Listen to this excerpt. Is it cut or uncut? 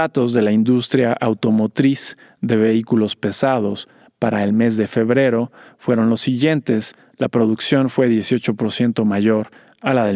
uncut